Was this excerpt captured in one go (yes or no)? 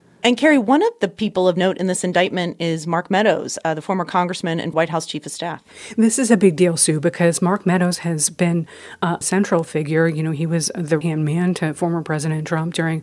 no